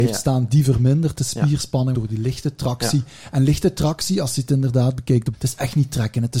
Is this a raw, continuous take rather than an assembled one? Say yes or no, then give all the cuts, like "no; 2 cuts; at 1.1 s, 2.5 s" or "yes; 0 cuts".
no; 2 cuts; at 1.9 s, 5.3 s